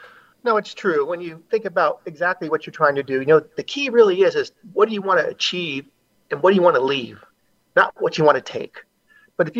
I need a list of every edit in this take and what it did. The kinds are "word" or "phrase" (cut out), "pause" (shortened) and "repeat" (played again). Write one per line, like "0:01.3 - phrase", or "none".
none